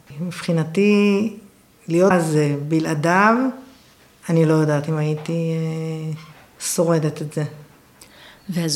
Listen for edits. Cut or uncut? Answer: cut